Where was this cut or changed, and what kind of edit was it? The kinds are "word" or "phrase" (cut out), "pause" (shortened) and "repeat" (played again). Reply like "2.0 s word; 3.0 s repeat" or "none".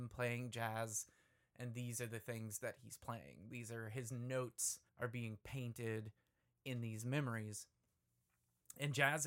4.9 s pause